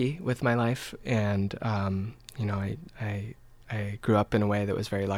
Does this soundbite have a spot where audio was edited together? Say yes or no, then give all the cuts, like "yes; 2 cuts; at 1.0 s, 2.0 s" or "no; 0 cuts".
no; 0 cuts